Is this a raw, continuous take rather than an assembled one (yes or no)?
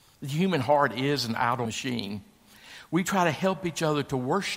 no